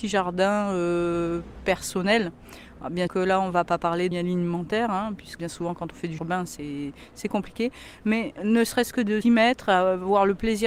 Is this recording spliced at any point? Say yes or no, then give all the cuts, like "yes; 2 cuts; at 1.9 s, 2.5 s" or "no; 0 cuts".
yes; 6 cuts; at 3.1 s, 4.1 s, 5.4 s, 6.2 s, 8.4 s, 9.2 s